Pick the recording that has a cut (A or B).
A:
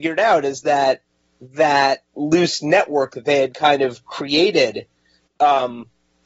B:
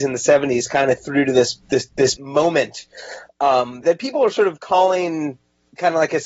B